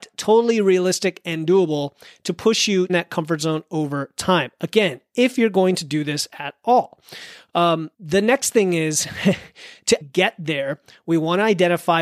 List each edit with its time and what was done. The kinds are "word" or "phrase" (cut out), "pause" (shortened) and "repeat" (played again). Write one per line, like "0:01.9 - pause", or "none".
0:02.9 - phrase
0:07.9 - pause
0:10.0 - word